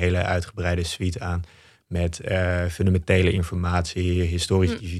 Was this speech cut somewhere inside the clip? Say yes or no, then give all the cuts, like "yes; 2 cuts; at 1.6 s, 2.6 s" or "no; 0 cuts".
no; 0 cuts